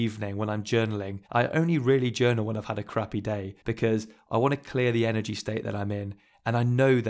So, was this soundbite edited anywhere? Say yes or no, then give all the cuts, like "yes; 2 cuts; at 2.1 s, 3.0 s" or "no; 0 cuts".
yes; 2 cuts; at 1.3 s, 3.6 s